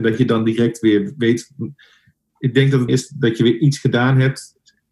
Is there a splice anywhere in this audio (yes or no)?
yes